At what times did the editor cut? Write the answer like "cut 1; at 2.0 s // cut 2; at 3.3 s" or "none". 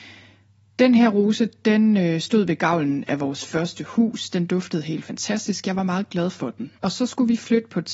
cut 1; at 6.8 s